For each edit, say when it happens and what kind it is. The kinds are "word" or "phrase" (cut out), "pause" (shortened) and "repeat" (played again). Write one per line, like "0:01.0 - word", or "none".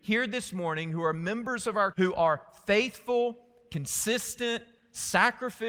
0:01.9 - word